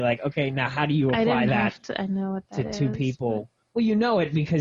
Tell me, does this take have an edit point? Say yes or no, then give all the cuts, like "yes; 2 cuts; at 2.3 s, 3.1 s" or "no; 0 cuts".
no; 0 cuts